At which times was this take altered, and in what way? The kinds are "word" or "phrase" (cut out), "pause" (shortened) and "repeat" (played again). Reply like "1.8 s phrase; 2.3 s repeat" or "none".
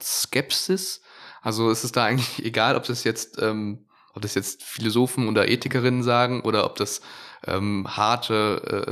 none